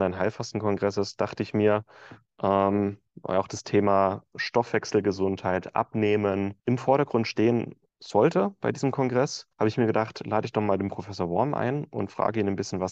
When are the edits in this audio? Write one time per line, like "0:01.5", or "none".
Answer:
0:06.6
0:07.9
0:09.5